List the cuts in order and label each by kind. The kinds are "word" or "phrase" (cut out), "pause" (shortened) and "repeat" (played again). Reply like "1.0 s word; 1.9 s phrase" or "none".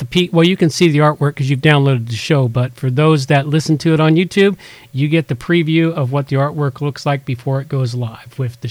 none